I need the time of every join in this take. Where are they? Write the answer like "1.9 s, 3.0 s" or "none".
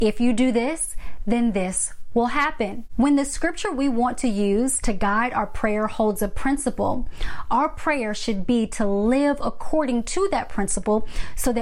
none